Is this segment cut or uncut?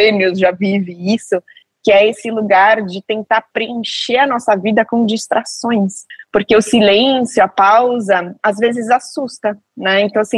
uncut